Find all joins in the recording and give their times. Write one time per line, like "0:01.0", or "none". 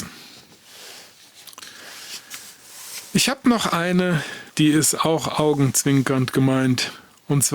0:04.5